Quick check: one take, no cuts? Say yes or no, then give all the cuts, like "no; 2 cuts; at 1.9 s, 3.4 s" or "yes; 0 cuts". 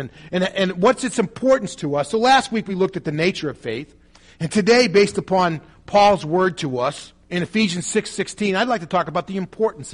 yes; 0 cuts